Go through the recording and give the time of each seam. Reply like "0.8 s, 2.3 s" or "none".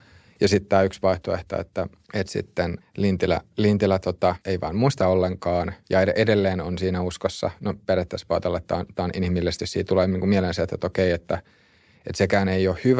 2.0 s, 2.8 s, 4.4 s, 5.0 s, 9.6 s